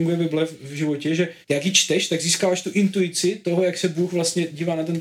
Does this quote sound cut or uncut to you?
cut